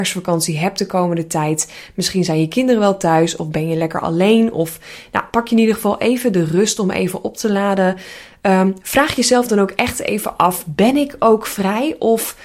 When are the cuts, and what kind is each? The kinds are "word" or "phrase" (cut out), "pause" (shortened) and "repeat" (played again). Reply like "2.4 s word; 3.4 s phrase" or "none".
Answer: none